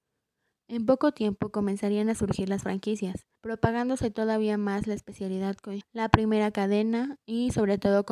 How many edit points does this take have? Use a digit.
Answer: 2